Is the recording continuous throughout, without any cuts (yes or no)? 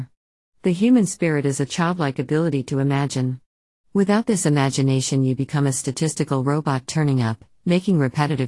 yes